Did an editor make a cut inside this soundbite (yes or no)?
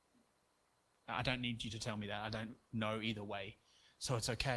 no